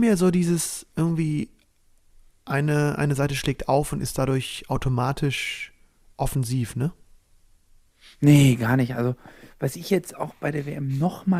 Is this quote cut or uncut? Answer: uncut